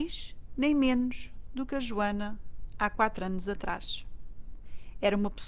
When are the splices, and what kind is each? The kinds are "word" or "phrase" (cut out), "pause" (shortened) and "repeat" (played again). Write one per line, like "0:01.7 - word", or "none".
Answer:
none